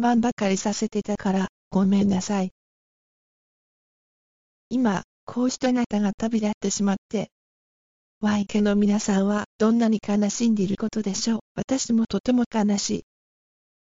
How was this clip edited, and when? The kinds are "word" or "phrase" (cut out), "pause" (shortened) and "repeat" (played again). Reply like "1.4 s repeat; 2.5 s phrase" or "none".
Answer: 9.5 s pause; 11.5 s pause